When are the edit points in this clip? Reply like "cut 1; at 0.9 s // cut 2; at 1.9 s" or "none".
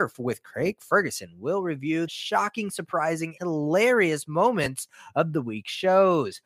cut 1; at 2.1 s // cut 2; at 3.4 s